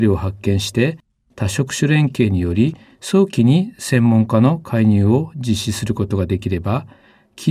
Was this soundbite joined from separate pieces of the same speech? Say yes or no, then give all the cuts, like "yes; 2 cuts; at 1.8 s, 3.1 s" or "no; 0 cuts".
no; 0 cuts